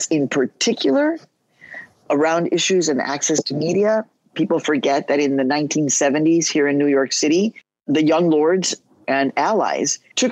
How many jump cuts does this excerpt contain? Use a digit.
0